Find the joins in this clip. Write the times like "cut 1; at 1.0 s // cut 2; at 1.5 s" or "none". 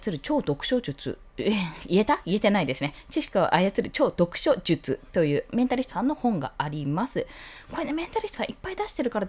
cut 1; at 5.9 s // cut 2; at 8.3 s